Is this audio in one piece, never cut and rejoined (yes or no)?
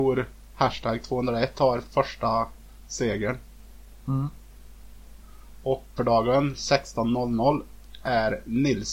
no